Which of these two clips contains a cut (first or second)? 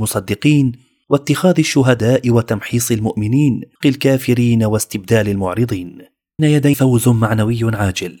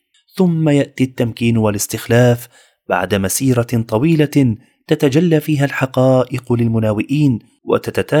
first